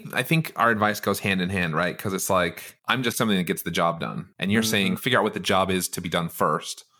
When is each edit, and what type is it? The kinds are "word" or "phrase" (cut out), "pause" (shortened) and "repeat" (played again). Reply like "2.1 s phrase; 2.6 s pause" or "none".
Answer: 2.8 s pause; 3.1 s phrase; 4.3 s pause